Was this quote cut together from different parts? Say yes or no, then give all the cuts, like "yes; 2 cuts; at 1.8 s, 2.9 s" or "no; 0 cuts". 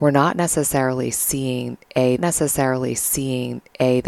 yes; 1 cut; at 2.2 s